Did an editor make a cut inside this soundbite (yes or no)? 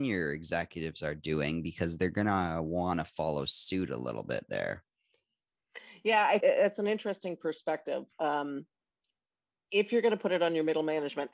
yes